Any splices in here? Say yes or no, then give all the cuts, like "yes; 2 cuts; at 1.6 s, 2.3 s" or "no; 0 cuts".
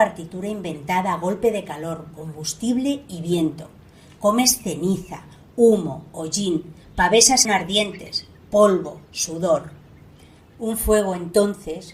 yes; 1 cut; at 7.4 s